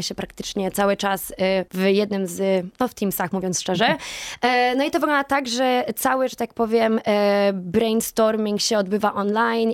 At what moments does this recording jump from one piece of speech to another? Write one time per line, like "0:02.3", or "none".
0:01.7